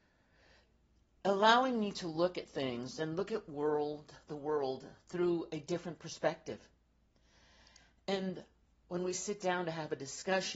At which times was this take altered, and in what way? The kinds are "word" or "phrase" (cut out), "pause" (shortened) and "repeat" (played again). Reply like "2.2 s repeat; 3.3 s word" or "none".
none